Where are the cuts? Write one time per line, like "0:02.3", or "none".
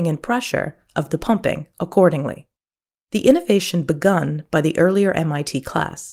none